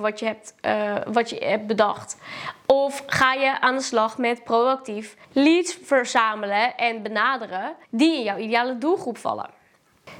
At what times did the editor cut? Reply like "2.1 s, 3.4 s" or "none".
5.2 s, 7.8 s